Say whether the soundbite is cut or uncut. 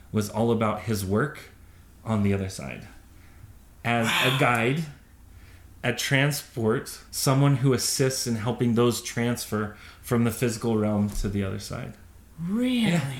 cut